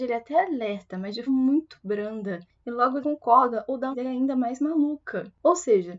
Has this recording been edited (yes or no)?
yes